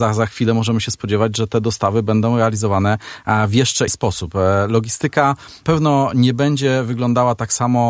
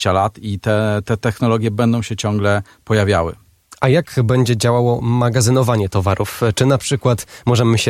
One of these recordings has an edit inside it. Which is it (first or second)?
first